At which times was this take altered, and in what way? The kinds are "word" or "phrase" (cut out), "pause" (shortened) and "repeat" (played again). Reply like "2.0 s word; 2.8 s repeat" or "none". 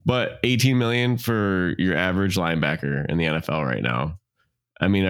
none